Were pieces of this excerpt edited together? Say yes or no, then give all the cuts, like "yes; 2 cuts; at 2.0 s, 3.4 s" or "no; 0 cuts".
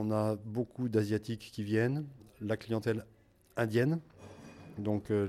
no; 0 cuts